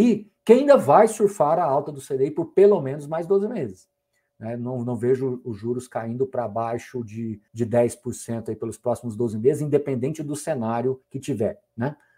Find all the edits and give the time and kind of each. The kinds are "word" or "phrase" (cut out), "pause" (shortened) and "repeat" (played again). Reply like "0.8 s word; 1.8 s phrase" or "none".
7.5 s pause; 11.0 s pause